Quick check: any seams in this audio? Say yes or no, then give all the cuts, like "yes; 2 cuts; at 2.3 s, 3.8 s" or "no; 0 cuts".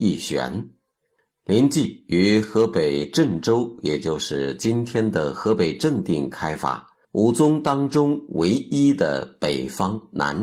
yes; 1 cut; at 7.0 s